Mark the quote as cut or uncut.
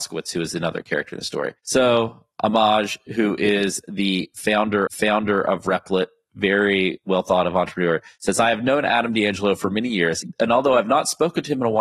cut